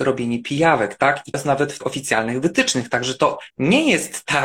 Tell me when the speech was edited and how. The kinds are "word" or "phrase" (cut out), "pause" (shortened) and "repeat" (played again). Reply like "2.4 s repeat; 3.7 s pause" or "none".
1.3 s word; 1.8 s word; 3.5 s pause